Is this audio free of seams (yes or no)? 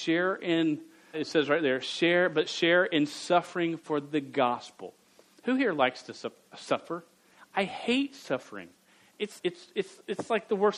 no